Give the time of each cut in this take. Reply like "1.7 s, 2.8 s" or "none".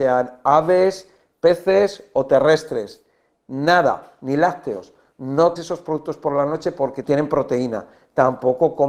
5.6 s, 7.0 s